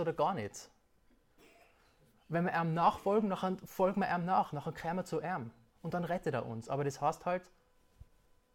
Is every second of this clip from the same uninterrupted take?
yes; 0 cuts

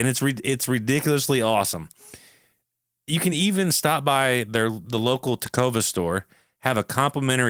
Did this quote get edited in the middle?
no; 0 cuts

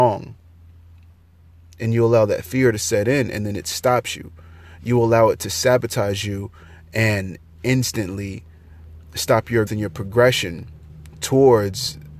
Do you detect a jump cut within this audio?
yes; 1 cut; at 9.7 s

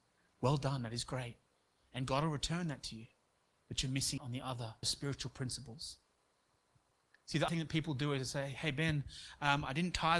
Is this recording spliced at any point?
yes; 3 cuts; at 4.2 s, 4.8 s, 7.5 s

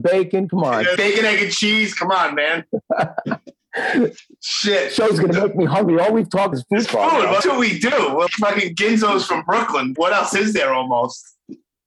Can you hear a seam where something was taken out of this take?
yes; 6 cuts; at 1.0 s, 6.5 s, 6.8 s, 7.4 s, 8.3 s, 10.0 s

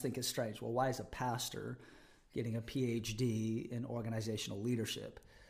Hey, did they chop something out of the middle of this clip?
no; 0 cuts

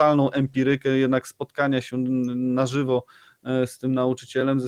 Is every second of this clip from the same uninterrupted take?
yes; 0 cuts

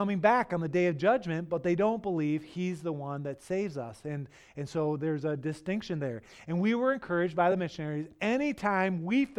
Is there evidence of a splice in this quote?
no; 0 cuts

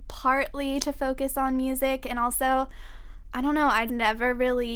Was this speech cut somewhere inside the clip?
yes; 1 cut; at 3.9 s

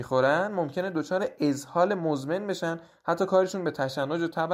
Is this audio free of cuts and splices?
yes; 0 cuts

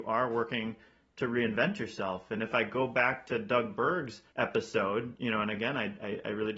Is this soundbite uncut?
no; 1 cut; at 4.3 s

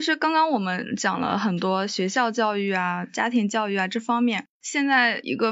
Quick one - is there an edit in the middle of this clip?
yes; 1 cut; at 4.5 s

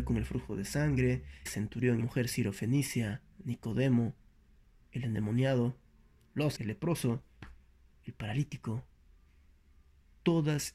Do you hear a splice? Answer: yes; 4 cuts; at 1.5 s, 2.0 s, 3.3 s, 6.6 s

